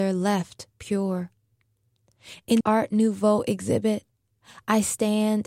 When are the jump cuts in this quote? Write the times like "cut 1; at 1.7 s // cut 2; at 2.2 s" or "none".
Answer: cut 1; at 2.6 s